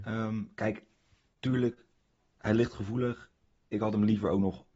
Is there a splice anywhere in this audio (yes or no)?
no